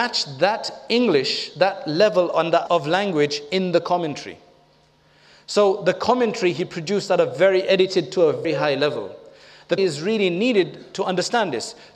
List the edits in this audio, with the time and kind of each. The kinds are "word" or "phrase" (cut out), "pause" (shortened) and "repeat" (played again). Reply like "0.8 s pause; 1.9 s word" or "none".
2.7 s word; 8.4 s word; 9.8 s word